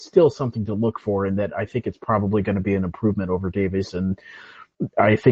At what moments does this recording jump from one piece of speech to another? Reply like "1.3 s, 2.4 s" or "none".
none